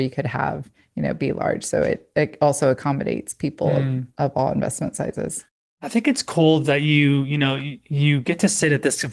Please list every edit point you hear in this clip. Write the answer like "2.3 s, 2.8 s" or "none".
none